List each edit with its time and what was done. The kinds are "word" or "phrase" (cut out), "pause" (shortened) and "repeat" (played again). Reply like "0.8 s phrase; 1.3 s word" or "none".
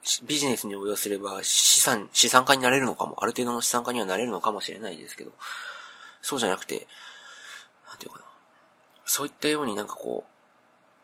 none